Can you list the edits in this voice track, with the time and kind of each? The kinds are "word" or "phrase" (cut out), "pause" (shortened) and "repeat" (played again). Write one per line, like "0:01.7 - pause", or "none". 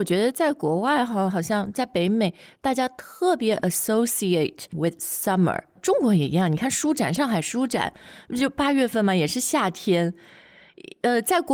0:04.7 - word
0:05.8 - word